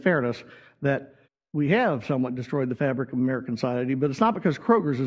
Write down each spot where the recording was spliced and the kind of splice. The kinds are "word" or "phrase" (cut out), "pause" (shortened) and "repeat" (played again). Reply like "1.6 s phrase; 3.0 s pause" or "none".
1.2 s pause